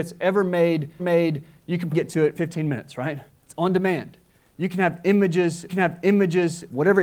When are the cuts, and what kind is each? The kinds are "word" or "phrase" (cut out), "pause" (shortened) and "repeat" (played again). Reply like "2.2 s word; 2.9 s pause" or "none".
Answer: 1.0 s repeat; 1.9 s word; 2.3 s word; 5.7 s repeat